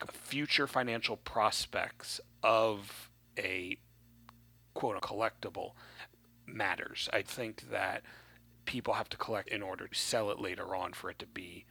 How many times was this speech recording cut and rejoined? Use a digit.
4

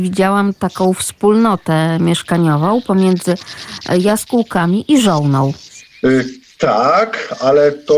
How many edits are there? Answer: 0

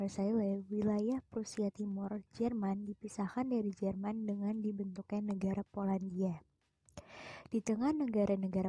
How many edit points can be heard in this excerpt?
0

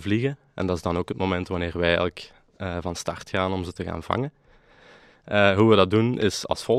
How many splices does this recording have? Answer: 0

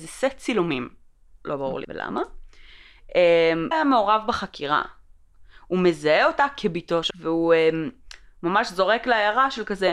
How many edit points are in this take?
3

